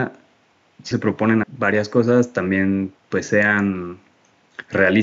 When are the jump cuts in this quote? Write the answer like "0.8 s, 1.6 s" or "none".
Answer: 0.9 s, 1.4 s, 3.0 s